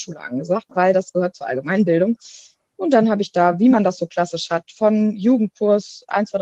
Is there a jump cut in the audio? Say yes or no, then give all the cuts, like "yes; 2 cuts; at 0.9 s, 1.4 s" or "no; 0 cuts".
no; 0 cuts